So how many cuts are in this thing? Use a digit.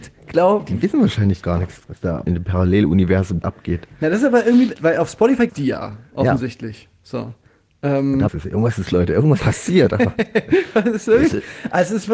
9